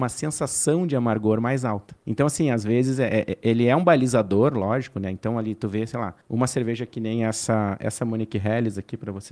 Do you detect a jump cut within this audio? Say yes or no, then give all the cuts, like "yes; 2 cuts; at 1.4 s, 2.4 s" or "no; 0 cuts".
yes; 2 cuts; at 2.0 s, 6.2 s